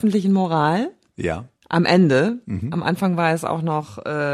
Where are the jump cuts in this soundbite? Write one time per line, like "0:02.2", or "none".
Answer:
0:01.6